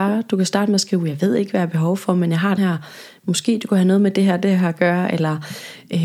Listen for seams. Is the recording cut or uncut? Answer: cut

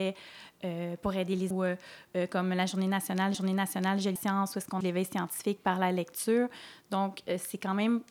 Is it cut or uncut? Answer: cut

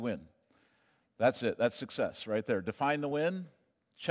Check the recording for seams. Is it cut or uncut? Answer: uncut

